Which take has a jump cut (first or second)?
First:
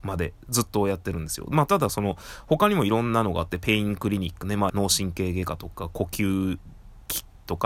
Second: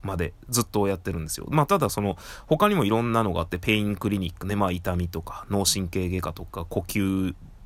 first